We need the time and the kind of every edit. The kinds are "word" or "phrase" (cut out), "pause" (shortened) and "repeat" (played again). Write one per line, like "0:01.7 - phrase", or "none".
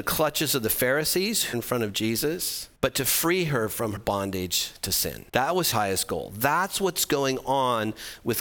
0:01.5 - phrase
0:02.8 - pause
0:04.0 - word
0:05.3 - pause
0:05.7 - word